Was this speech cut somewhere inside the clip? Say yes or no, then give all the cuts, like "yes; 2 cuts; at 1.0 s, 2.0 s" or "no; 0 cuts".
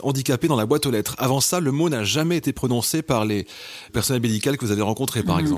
yes; 1 cut; at 3.9 s